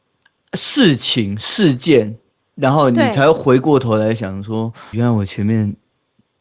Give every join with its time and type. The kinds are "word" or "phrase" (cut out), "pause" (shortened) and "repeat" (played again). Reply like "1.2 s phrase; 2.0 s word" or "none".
2.3 s pause; 4.9 s word